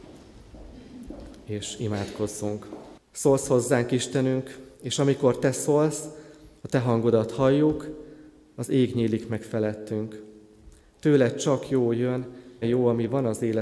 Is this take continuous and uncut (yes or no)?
no